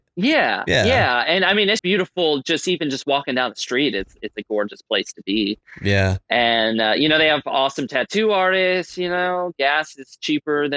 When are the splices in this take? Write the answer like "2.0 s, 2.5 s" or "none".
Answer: 1.8 s

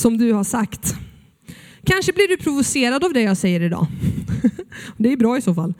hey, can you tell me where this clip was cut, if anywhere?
none

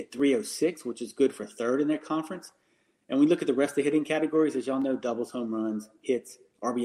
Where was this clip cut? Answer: none

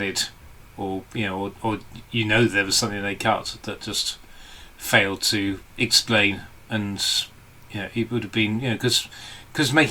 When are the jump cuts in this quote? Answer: none

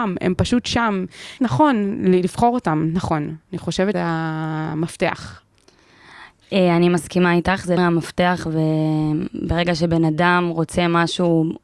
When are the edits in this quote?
1.4 s, 3.9 s, 7.8 s

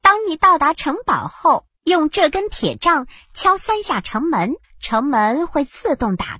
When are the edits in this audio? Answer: 1.7 s, 4.6 s

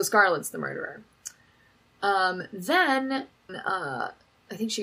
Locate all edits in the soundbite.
3.5 s

